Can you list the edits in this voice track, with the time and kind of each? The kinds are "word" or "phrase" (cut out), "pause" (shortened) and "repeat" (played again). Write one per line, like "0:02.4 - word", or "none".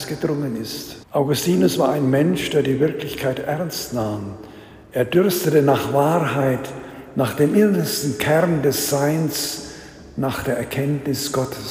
0:01.0 - pause